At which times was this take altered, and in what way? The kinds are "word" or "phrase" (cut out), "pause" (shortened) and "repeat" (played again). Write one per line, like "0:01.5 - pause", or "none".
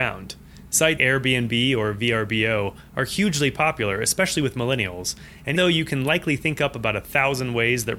0:01.0 - word
0:05.6 - word